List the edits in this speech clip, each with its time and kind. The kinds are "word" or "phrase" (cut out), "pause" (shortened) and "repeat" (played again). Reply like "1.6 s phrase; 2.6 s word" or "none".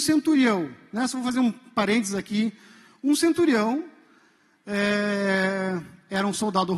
none